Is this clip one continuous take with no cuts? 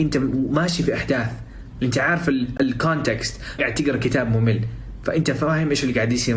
no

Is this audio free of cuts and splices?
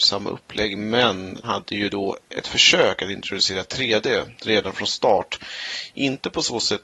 no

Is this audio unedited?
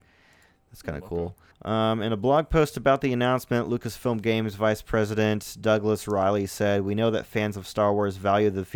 no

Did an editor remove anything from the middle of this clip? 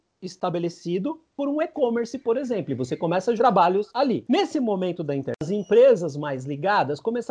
yes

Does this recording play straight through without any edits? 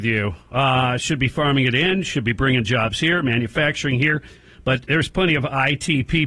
yes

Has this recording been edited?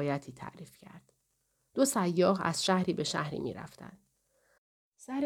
no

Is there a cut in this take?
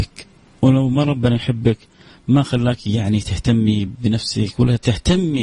no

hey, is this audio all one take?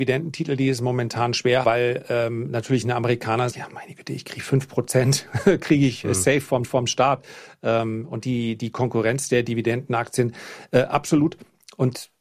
no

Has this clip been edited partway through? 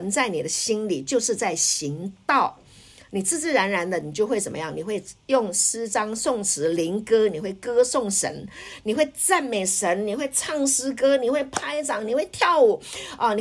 no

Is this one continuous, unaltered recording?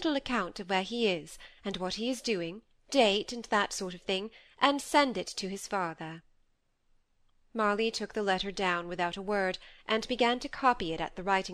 yes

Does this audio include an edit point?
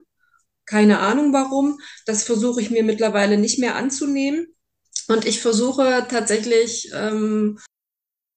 no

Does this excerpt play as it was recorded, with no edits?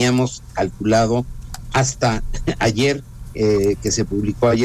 yes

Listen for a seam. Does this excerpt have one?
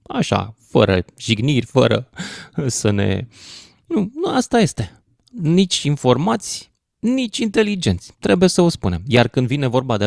no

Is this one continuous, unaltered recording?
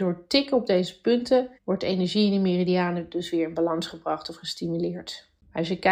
no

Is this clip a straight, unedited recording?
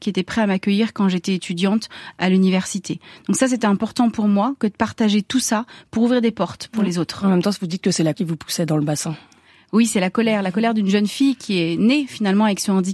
no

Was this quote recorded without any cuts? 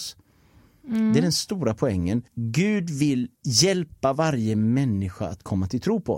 no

